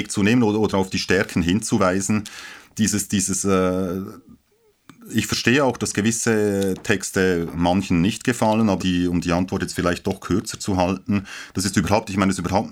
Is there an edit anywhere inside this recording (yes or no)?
yes